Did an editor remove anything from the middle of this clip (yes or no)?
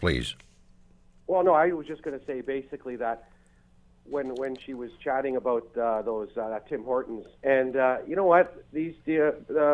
yes